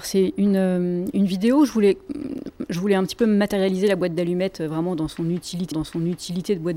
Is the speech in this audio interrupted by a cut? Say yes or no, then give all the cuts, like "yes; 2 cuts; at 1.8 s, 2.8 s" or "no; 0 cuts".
yes; 1 cut; at 5.7 s